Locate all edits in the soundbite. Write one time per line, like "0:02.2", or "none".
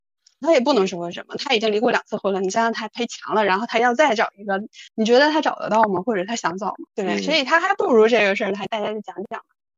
0:04.9
0:06.9